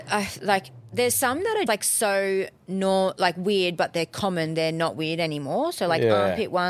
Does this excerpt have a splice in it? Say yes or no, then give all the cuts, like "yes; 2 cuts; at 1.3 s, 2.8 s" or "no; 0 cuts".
yes; 1 cut; at 1.7 s